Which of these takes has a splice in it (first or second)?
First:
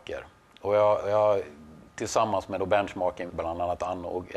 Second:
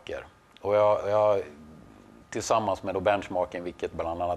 first